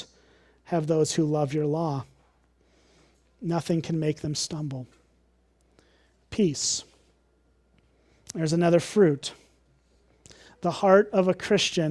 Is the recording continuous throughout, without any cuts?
yes; 0 cuts

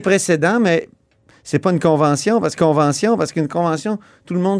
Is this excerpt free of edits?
no; 1 cut; at 2.6 s

